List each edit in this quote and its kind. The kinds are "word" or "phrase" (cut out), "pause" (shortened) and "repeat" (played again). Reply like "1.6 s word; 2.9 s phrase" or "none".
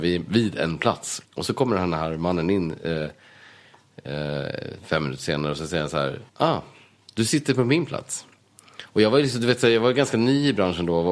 1.2 s pause; 6.3 s pause